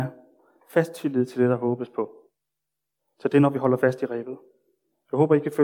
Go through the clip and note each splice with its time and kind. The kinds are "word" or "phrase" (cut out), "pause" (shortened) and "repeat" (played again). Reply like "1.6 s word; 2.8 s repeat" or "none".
none